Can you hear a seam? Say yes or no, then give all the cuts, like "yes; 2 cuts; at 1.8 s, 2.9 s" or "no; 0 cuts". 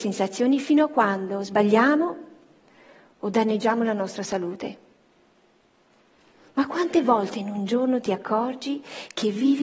no; 0 cuts